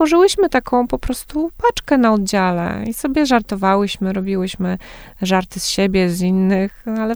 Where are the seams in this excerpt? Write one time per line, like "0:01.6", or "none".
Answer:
none